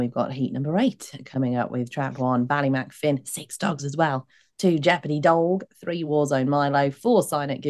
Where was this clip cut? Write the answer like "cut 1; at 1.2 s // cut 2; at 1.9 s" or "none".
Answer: none